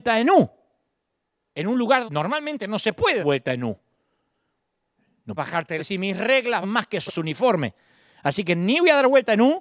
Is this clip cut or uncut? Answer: cut